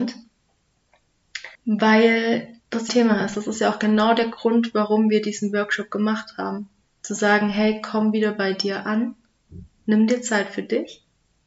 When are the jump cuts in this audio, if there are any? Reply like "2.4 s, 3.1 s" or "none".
1.5 s, 2.9 s, 6.8 s

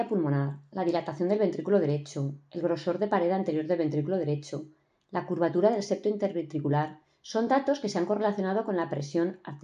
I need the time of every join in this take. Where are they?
none

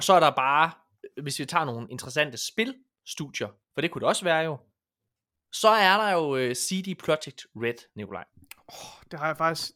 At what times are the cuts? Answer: none

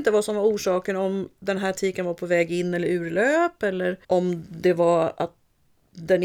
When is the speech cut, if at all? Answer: 4.0 s

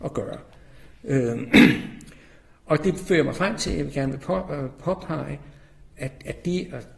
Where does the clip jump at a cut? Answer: none

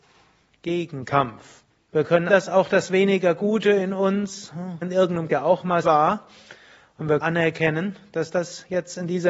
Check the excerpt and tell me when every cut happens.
1.7 s, 2.3 s, 4.8 s, 5.3 s, 5.8 s, 7.2 s

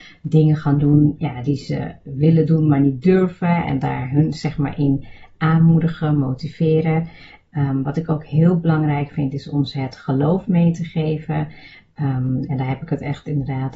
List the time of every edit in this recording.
none

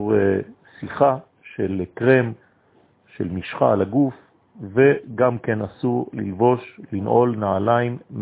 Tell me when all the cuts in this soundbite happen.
1.3 s

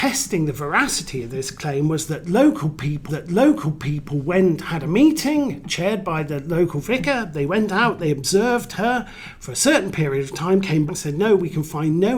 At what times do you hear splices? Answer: 3.1 s, 10.9 s

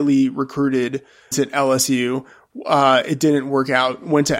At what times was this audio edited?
1.3 s

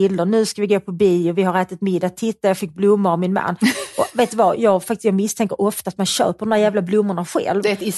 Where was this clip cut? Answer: 4.6 s

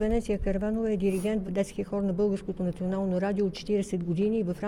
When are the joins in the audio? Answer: 1.4 s

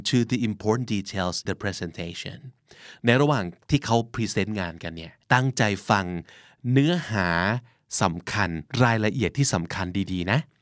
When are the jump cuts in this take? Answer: 1.4 s, 5.2 s

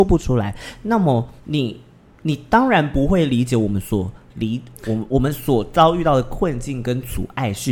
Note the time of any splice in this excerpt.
1.4 s

